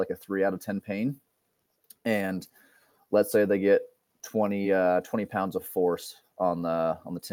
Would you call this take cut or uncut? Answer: uncut